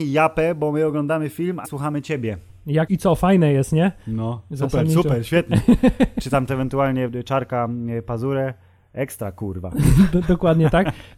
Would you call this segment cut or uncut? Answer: cut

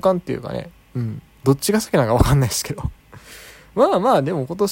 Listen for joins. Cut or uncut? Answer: cut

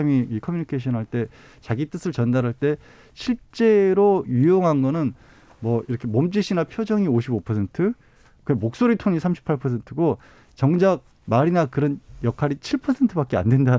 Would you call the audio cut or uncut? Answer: uncut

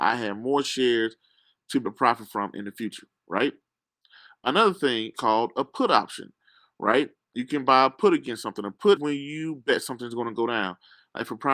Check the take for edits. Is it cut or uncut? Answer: cut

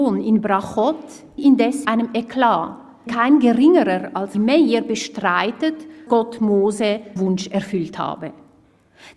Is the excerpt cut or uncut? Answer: cut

